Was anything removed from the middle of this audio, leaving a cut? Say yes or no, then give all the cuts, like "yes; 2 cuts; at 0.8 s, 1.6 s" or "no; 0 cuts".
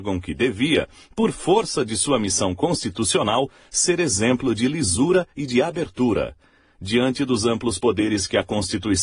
no; 0 cuts